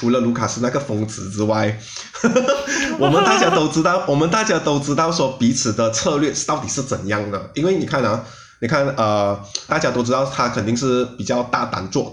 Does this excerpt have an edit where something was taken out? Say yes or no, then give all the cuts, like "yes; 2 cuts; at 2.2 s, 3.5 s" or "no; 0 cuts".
yes; 1 cut; at 9.7 s